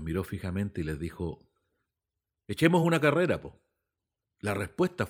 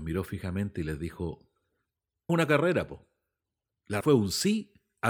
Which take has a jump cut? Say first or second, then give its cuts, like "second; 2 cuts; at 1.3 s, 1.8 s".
second; 2 cuts; at 2.3 s, 4.0 s